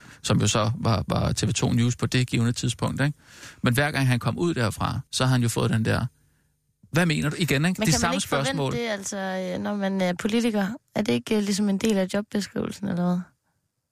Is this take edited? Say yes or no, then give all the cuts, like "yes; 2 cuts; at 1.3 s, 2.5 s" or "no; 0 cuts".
yes; 1 cut; at 5.1 s